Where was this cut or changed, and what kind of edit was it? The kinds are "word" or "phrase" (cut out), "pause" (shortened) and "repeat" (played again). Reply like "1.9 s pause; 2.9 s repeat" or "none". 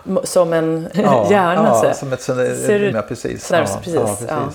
0.9 s word; 1.8 s word; 2.9 s word; 3.5 s word